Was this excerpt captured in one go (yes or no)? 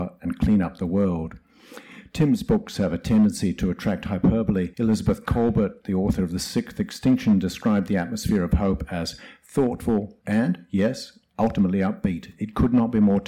no